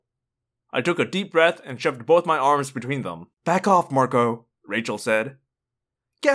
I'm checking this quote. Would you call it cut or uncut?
cut